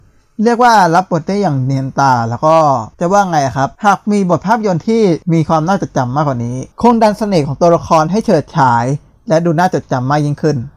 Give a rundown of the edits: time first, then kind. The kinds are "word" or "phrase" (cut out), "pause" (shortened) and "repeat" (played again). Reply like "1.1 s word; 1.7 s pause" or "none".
2.9 s pause; 3.7 s pause; 5.2 s pause; 6.7 s pause